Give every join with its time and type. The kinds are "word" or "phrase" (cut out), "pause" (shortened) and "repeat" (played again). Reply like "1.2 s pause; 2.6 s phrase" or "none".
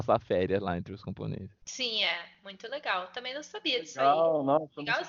1.6 s pause